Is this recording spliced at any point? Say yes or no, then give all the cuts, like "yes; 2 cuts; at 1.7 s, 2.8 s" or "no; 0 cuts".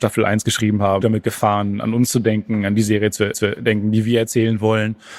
yes; 2 cuts; at 1.0 s, 3.3 s